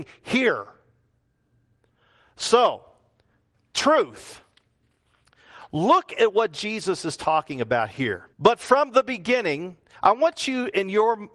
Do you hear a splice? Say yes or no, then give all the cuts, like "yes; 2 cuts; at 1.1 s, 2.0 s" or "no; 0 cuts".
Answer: yes; 1 cut; at 8.3 s